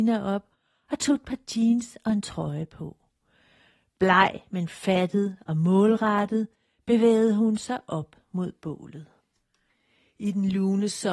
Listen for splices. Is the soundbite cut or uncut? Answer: uncut